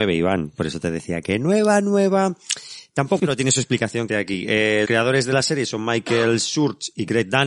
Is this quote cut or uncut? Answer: cut